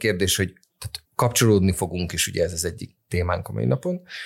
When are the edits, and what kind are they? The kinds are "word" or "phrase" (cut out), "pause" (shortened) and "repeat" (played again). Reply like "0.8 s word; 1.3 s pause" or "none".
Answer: 1.1 s pause